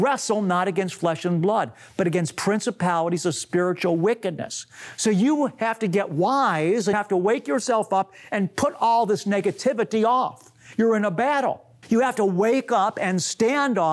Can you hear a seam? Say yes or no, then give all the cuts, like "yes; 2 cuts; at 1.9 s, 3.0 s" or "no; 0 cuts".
yes; 2 cuts; at 6.9 s, 11.8 s